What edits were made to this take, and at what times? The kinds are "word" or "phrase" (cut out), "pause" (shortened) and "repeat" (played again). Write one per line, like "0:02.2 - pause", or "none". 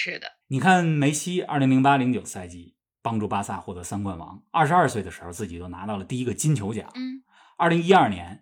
none

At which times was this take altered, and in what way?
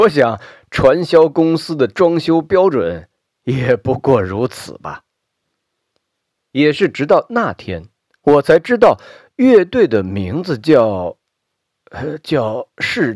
none

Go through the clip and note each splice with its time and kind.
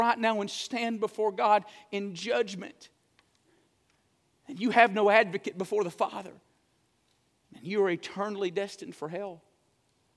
none

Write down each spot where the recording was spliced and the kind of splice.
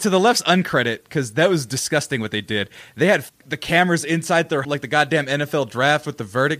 0:03.3 - word
0:04.6 - word

